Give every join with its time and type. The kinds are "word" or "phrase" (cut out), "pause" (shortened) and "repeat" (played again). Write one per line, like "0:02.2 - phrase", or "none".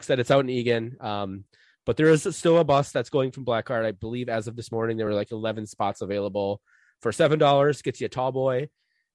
none